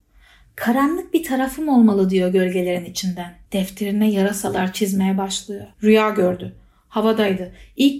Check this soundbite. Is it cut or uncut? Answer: cut